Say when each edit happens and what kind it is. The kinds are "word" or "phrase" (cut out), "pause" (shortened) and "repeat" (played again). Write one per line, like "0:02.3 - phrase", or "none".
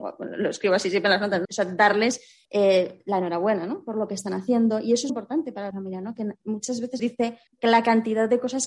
0:01.4 - phrase
0:02.4 - pause
0:05.1 - word
0:05.7 - phrase
0:07.0 - phrase
0:07.5 - pause